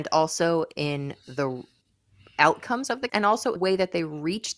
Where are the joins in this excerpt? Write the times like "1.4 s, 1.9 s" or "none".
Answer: 3.1 s, 3.6 s